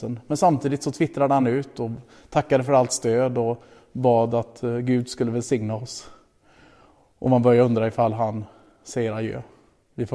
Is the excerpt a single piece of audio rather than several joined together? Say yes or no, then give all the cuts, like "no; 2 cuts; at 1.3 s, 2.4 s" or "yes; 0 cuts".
yes; 0 cuts